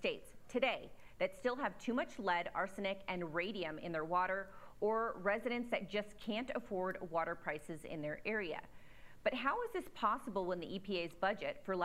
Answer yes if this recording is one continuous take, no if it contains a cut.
yes